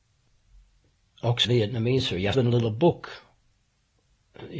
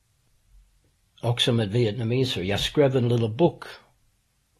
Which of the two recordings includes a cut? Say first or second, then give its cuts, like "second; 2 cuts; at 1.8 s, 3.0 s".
first; 2 cuts; at 1.4 s, 2.3 s